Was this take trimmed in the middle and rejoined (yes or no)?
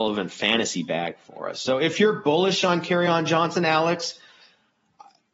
no